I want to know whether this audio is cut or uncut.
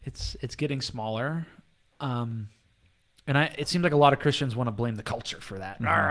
uncut